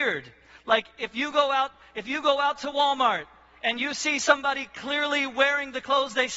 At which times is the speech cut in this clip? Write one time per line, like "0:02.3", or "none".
none